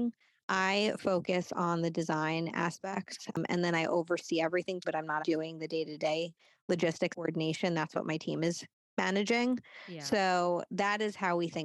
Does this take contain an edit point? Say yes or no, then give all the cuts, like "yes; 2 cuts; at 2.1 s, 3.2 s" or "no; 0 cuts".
yes; 3 cuts; at 4.8 s, 5.2 s, 7.1 s